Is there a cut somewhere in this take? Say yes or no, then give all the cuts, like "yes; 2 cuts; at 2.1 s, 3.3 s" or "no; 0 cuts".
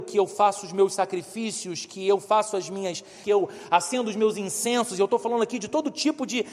yes; 1 cut; at 3.2 s